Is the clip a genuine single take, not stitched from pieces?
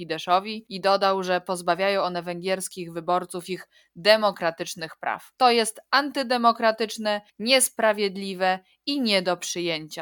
yes; 0 cuts

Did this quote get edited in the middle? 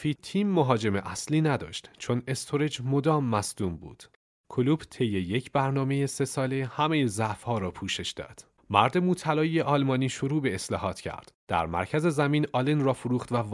no; 0 cuts

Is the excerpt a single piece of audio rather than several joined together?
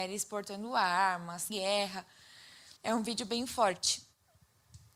no; 2 cuts; at 1.5 s, 2.8 s

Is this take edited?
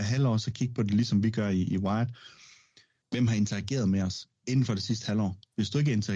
no; 0 cuts

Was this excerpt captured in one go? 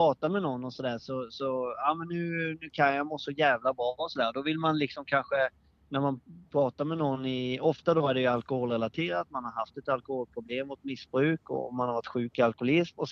yes; 0 cuts

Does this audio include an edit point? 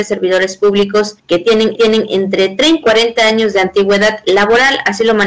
yes; 3 cuts; at 1.2 s, 1.7 s, 2.8 s

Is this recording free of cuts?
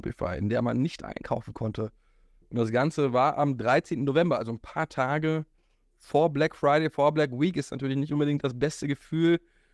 yes; 0 cuts

